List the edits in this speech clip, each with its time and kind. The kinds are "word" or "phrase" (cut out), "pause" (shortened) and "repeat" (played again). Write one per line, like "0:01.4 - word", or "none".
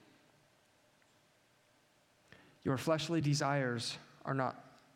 none